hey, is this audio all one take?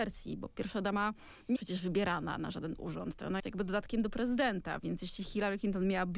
no; 2 cuts; at 1.6 s, 3.4 s

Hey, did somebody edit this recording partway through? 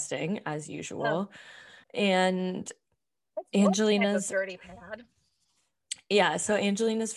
yes; 1 cut; at 1.8 s

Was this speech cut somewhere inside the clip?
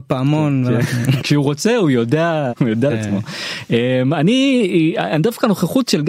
yes; 3 cuts; at 1.2 s, 2.5 s, 2.9 s

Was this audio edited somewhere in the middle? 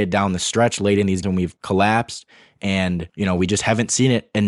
yes; 2 cuts; at 1.2 s, 3.1 s

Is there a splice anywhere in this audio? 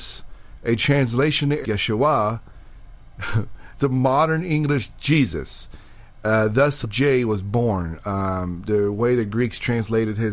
yes; 4 cuts; at 1.6 s, 3.8 s, 6.8 s, 8.7 s

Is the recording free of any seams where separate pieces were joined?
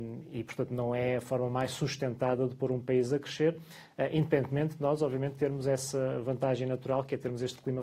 yes; 0 cuts

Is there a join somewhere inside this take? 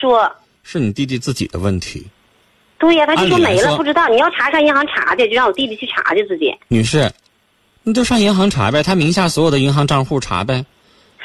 no; 0 cuts

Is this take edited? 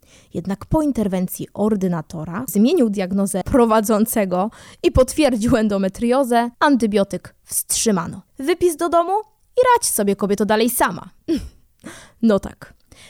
yes; 4 cuts; at 2.5 s, 3.4 s, 6.5 s, 8.3 s

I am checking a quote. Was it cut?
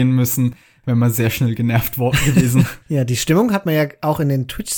yes; 1 cut; at 2.8 s

